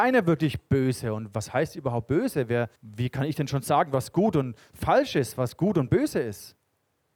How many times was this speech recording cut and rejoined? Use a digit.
1